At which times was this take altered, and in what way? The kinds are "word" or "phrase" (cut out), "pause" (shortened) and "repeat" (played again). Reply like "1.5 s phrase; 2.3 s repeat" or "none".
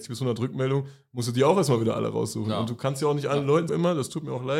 3.7 s word